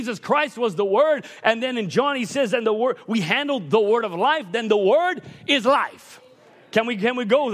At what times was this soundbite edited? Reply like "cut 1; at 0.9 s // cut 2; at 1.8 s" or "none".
none